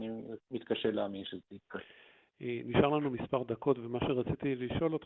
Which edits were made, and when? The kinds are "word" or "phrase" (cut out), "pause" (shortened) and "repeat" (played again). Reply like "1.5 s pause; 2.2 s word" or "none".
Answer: none